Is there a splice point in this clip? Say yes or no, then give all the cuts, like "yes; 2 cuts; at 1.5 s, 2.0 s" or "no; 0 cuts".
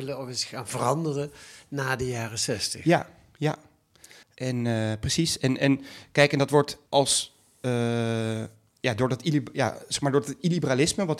yes; 2 cuts; at 4.2 s, 6.9 s